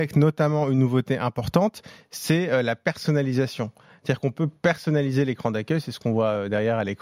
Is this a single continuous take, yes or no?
yes